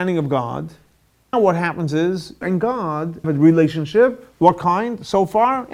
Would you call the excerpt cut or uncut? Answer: cut